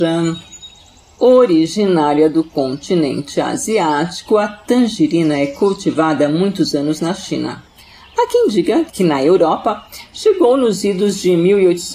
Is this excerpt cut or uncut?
uncut